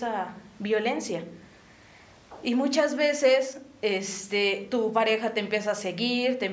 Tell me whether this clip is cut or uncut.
uncut